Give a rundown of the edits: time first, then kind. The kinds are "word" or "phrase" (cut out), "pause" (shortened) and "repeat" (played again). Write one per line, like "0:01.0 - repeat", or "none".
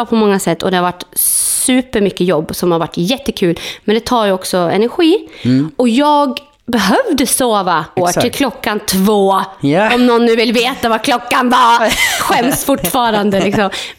0:08.0 - word